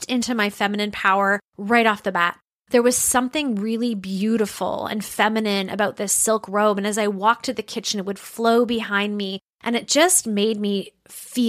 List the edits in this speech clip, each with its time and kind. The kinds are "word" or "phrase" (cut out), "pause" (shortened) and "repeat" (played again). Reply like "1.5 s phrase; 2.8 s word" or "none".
none